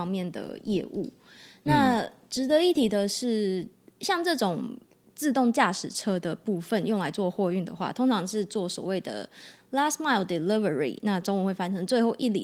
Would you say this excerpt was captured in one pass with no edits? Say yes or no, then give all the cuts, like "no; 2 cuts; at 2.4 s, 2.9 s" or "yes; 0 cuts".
yes; 0 cuts